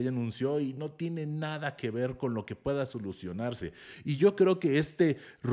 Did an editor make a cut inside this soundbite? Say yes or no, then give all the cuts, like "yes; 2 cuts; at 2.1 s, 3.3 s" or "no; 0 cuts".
no; 0 cuts